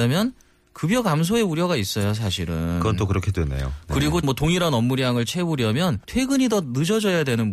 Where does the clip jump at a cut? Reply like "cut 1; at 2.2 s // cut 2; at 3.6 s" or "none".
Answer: cut 1; at 4.2 s // cut 2; at 6.0 s